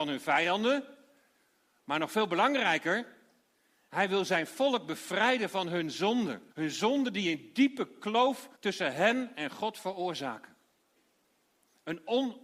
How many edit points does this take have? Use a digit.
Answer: 2